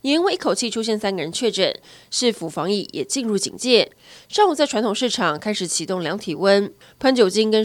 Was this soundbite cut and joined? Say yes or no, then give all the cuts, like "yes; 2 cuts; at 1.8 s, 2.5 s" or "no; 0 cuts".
no; 0 cuts